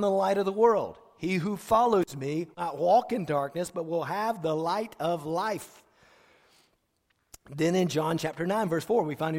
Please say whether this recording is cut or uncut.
cut